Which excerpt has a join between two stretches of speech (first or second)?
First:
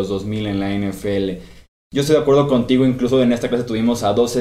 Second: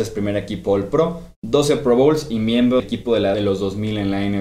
second